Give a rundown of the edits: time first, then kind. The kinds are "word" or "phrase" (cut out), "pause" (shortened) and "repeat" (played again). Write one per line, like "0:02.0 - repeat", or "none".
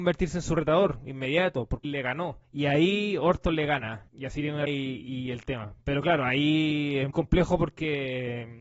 0:01.8 - phrase
0:02.4 - pause
0:04.1 - pause
0:04.7 - word
0:05.8 - pause
0:07.1 - word